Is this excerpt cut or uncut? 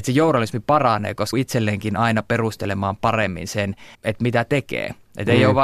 cut